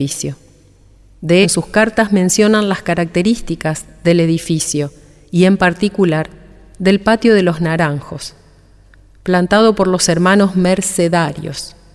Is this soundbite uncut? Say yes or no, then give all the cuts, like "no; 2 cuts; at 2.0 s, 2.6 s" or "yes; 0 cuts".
no; 1 cut; at 1.4 s